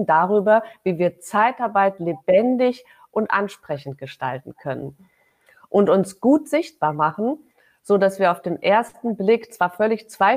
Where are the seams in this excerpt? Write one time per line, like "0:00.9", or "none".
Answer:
none